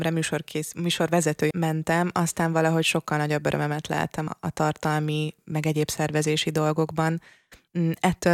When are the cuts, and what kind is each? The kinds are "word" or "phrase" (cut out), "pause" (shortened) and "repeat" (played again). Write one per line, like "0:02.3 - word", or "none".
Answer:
0:01.5 - word
0:04.3 - word

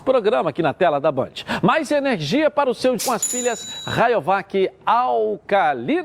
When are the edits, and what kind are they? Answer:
0:03.0 - word

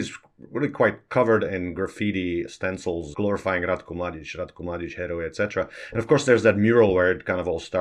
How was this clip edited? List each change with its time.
0:03.1 - word

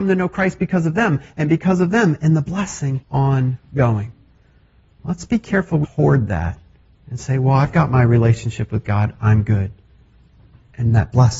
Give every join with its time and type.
0:03.0 - word
0:05.8 - phrase

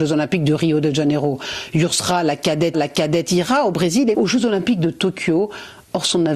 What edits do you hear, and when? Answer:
0:02.7 - repeat
0:04.1 - word

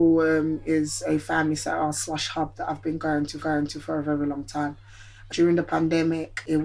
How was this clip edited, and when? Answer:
0:03.4 - repeat

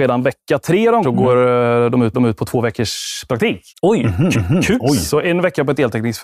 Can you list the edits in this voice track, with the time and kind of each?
0:01.0 - phrase
0:02.1 - repeat
0:03.7 - pause
0:04.3 - repeat

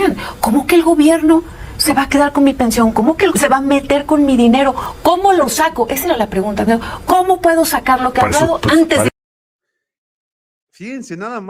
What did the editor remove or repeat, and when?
0:03.3 - word

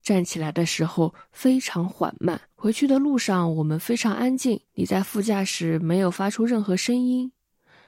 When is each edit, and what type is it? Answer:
0:02.5 - pause
0:04.7 - pause

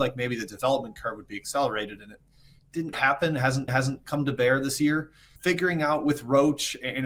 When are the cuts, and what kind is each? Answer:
0:02.9 - word
0:03.7 - repeat
0:05.4 - word

